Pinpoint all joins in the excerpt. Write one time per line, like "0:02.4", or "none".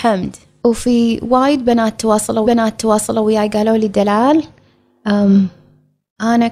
0:02.4